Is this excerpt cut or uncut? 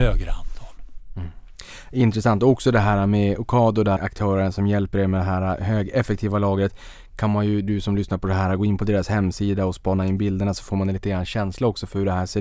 cut